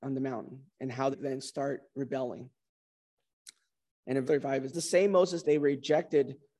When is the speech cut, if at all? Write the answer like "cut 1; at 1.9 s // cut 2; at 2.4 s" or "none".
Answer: cut 1; at 1.1 s // cut 2; at 4.2 s // cut 3; at 4.7 s // cut 4; at 5.4 s